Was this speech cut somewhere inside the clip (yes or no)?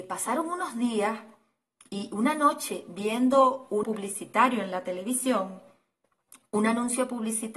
yes